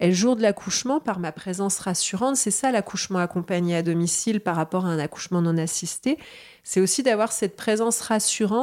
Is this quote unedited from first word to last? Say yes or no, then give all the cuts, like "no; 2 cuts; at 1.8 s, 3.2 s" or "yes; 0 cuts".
yes; 0 cuts